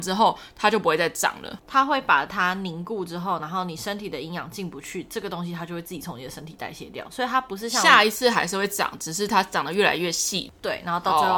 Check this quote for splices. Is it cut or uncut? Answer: cut